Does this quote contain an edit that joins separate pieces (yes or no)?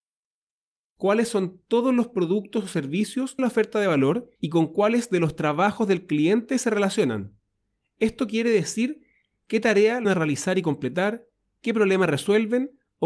yes